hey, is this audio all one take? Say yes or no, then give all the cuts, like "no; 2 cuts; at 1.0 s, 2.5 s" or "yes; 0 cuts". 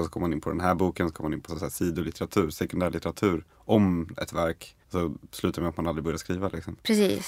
no; 3 cuts; at 1.5 s, 3.5 s, 4.8 s